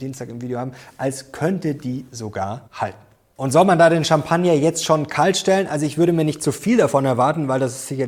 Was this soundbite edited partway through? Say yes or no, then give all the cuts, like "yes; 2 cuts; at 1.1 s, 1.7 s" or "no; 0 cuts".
yes; 1 cut; at 2.7 s